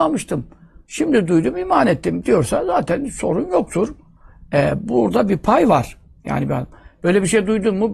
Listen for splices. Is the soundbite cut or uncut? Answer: uncut